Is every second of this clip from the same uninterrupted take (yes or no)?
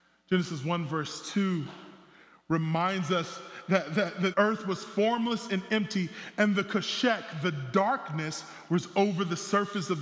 no